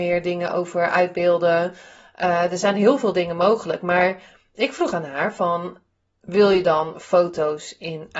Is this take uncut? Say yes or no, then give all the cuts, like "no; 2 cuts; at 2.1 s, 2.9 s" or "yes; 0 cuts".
yes; 0 cuts